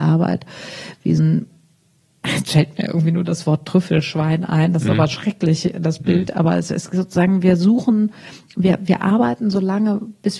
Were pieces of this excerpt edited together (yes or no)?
yes